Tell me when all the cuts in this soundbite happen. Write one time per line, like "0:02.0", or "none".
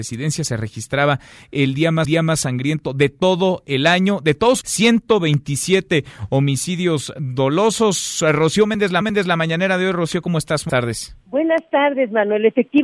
0:02.0
0:04.6
0:09.0
0:10.7
0:11.2